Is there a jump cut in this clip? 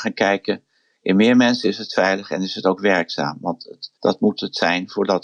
yes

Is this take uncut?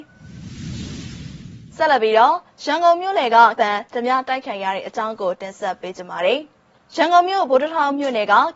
no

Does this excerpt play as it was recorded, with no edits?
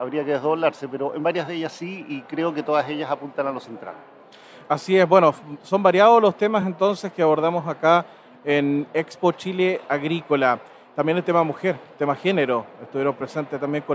yes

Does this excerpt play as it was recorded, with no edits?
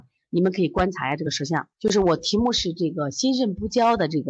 no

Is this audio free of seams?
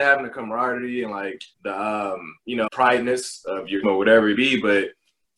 no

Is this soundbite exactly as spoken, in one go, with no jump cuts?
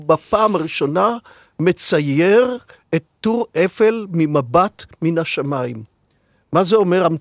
yes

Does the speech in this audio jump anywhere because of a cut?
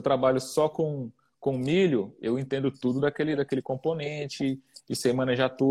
no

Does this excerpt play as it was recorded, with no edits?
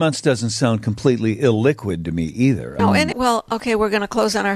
no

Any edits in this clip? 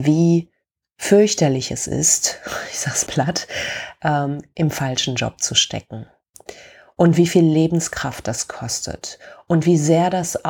yes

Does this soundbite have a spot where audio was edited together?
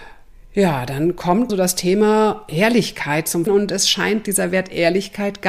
yes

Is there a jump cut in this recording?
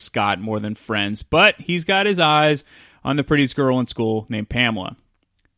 no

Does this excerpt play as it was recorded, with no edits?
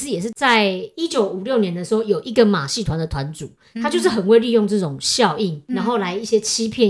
no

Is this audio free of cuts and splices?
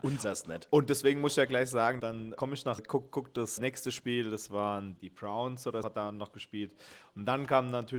no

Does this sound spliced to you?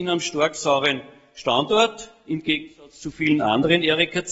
no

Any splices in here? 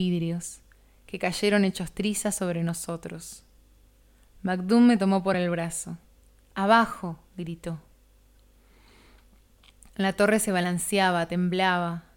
no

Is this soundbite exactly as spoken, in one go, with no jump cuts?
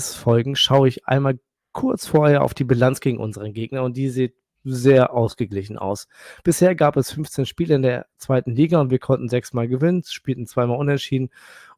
yes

